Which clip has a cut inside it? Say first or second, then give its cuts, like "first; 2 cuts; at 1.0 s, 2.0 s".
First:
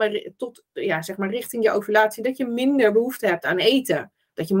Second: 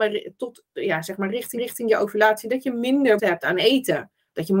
second; 2 cuts; at 1.6 s, 3.2 s